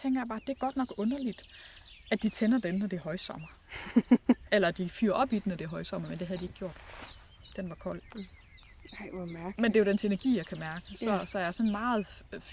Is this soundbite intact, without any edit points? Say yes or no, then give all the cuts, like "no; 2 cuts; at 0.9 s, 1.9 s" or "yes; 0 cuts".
yes; 0 cuts